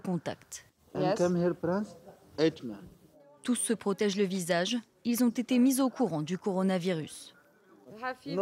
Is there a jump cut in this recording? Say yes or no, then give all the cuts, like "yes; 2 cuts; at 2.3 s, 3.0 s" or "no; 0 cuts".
no; 0 cuts